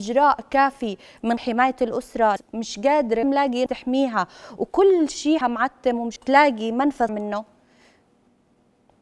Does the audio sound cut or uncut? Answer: cut